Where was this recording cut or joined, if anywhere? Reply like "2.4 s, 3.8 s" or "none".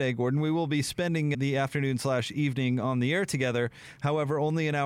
1.3 s

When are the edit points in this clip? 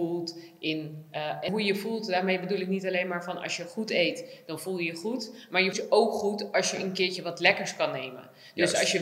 1.5 s, 5.7 s

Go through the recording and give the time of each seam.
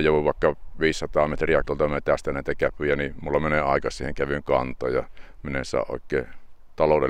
1.6 s

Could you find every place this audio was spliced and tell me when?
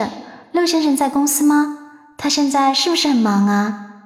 none

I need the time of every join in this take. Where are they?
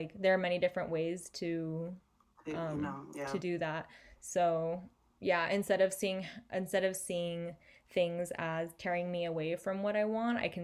none

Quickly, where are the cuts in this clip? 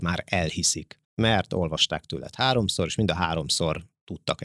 1.0 s

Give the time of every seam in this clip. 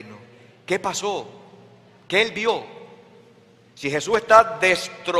none

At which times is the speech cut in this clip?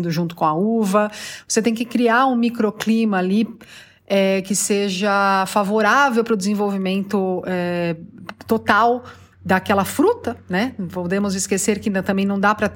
none

